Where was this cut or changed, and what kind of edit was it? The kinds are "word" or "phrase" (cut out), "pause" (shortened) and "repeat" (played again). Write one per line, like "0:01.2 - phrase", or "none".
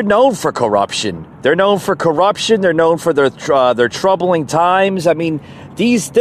0:01.3 - pause